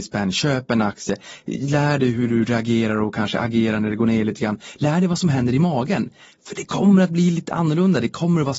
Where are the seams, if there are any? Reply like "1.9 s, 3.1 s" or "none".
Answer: none